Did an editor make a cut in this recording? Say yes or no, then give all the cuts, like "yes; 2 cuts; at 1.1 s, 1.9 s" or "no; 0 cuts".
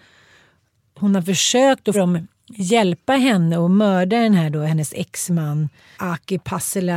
yes; 2 cuts; at 1.9 s, 5.9 s